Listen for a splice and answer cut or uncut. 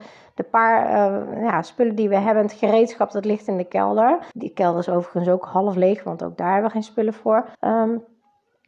cut